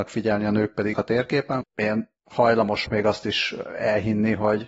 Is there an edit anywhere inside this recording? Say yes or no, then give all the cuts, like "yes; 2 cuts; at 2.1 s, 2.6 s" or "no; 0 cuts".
yes; 3 cuts; at 0.9 s, 1.6 s, 2.9 s